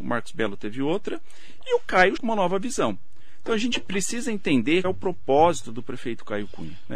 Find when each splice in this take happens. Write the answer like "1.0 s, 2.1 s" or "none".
2.2 s, 4.8 s